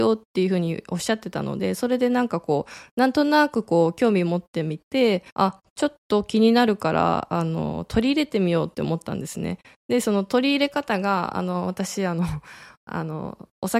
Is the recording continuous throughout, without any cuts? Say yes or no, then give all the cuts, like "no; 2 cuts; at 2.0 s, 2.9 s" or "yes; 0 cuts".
no; 1 cut; at 5.3 s